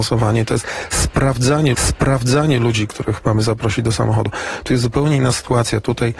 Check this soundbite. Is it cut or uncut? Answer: cut